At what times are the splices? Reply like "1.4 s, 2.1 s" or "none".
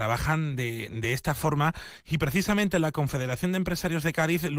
none